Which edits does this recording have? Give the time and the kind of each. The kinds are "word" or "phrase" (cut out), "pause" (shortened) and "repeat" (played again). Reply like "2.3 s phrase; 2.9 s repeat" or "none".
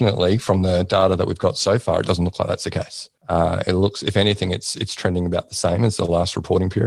3.2 s pause